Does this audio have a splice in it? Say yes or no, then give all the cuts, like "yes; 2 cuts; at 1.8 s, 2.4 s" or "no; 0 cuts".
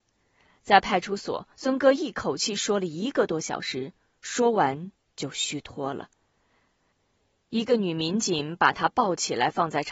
yes; 1 cut; at 1.5 s